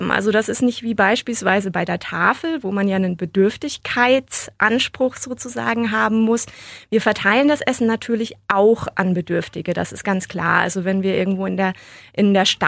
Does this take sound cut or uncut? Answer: uncut